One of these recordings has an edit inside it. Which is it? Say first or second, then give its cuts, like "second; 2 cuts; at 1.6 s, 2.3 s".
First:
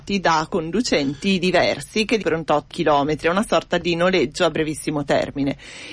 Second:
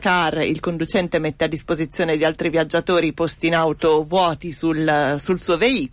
first; 2 cuts; at 2.2 s, 2.7 s